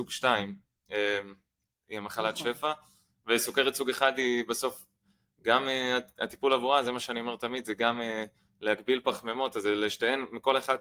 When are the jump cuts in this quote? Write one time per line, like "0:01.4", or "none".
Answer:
none